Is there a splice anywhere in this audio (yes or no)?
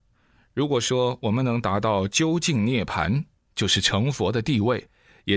no